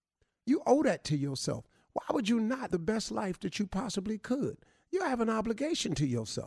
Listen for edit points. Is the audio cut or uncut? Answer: cut